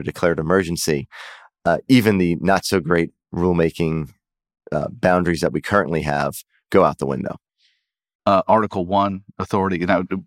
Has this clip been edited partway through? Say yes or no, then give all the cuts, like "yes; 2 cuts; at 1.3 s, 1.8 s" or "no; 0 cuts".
no; 0 cuts